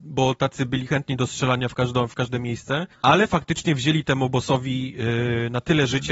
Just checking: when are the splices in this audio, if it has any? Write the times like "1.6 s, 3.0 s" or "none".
2.9 s